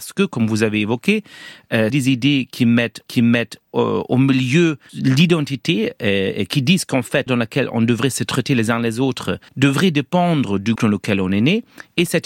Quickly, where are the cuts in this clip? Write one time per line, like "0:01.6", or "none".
0:01.9
0:03.1
0:04.9
0:07.3
0:09.5
0:10.8

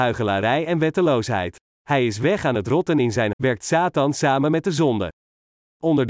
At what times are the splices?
0:01.6
0:03.3

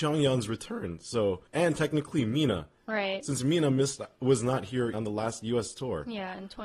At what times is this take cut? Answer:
0:01.5
0:04.9

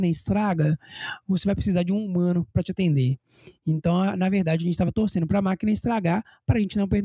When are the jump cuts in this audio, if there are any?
none

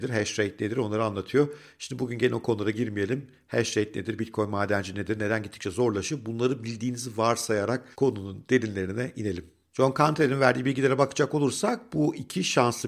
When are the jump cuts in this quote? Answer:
0:07.9

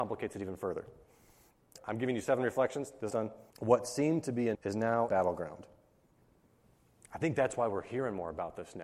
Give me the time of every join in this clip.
0:01.8
0:03.1
0:03.5
0:04.5
0:05.1

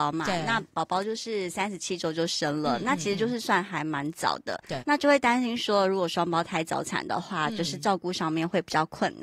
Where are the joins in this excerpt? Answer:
0:04.8

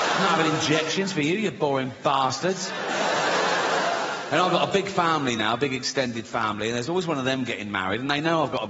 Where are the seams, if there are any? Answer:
none

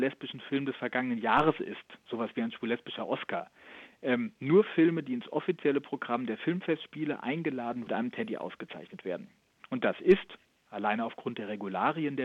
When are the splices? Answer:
0:07.9

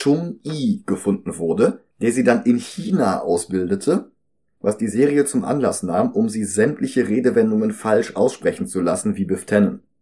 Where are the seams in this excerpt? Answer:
0:01.9

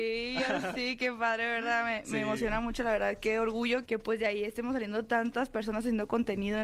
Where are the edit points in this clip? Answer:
0:03.9

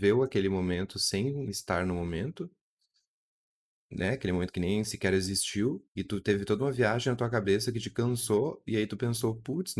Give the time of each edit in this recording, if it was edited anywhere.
0:05.9

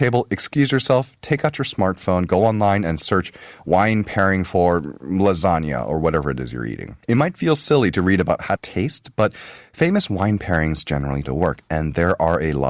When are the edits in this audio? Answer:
0:07.0
0:08.6
0:11.2

